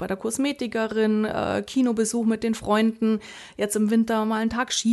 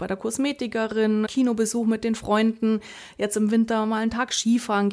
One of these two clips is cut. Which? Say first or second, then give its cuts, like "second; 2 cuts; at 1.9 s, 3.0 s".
second; 1 cut; at 1.3 s